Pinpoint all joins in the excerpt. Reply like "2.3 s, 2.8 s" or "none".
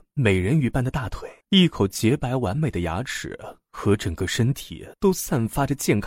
1.4 s, 4.9 s